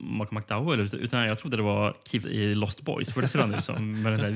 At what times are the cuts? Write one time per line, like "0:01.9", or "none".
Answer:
0:02.2